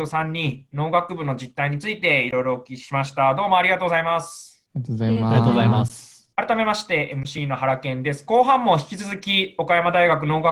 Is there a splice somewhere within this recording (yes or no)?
yes